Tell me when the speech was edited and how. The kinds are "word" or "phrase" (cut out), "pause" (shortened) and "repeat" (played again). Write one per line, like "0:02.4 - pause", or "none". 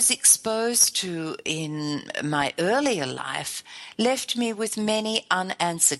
none